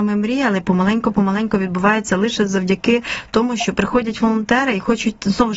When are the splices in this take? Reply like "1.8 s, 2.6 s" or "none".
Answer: none